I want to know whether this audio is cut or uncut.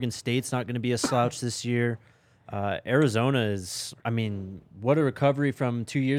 cut